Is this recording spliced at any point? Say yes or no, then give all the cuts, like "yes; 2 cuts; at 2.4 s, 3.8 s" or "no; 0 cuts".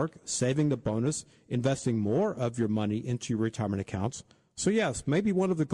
no; 0 cuts